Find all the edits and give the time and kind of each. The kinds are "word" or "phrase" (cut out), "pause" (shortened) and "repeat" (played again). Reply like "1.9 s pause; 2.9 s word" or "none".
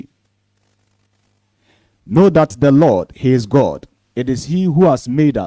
4.0 s pause